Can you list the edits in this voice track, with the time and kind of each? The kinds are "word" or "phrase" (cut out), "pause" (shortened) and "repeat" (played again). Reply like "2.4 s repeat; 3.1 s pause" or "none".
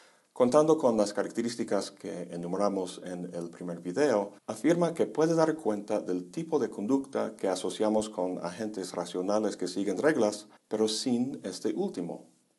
4.4 s pause; 10.6 s pause

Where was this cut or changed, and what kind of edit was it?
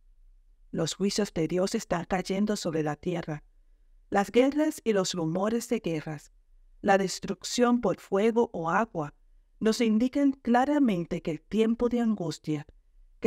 none

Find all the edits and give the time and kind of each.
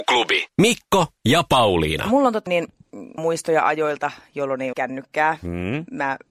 2.5 s word; 3.2 s word; 4.7 s word

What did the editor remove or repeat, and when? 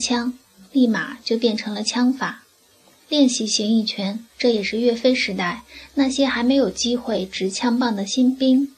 4.3 s pause

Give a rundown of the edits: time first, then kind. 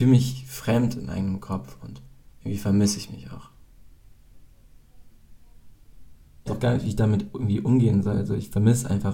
2.3 s pause; 6.5 s word

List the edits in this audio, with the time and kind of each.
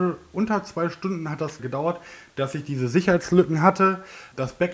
1.6 s word

